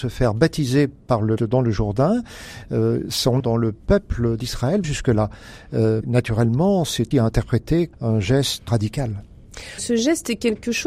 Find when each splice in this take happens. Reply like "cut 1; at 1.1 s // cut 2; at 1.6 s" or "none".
cut 1; at 1.4 s // cut 2; at 3.4 s // cut 3; at 4.8 s // cut 4; at 6.0 s // cut 5; at 7.1 s // cut 6; at 7.9 s // cut 7; at 8.7 s